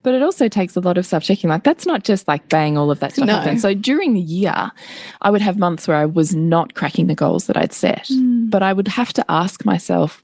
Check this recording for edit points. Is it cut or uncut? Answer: uncut